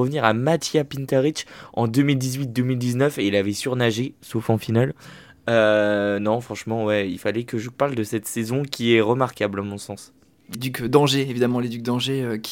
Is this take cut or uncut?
cut